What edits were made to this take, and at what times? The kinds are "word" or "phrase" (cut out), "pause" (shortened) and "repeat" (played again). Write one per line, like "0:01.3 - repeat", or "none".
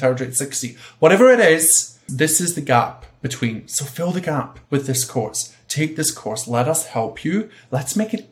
0:02.1 - word
0:04.6 - pause